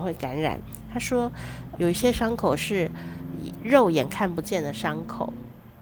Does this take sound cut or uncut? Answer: cut